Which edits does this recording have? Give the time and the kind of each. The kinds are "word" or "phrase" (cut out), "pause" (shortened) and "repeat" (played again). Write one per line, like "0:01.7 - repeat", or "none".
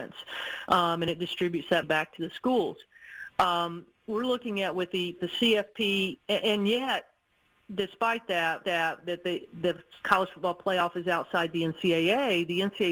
0:01.8 - word
0:05.2 - word
0:08.6 - repeat
0:10.0 - pause